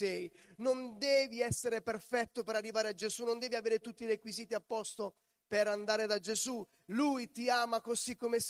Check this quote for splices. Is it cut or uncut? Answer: uncut